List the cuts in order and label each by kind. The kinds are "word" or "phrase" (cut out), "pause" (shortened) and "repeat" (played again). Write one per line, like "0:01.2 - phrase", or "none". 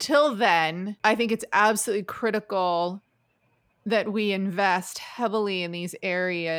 none